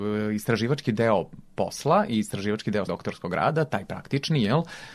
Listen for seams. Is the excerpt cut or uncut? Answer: cut